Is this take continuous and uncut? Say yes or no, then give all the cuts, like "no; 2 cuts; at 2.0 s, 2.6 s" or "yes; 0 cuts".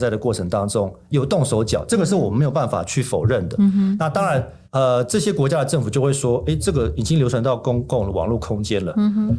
no; 1 cut; at 4.6 s